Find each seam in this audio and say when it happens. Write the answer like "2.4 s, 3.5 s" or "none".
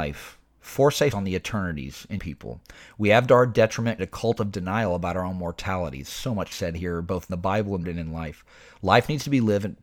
1.1 s, 2.2 s, 4.0 s, 6.5 s, 7.3 s, 7.8 s